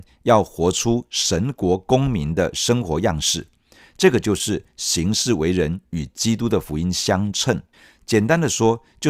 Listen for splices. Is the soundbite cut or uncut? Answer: cut